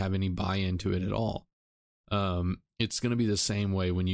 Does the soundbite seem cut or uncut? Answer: uncut